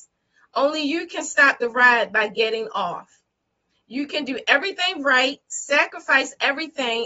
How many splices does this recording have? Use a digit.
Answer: 0